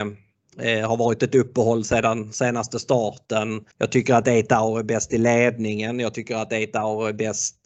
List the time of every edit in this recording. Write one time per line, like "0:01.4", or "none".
0:03.7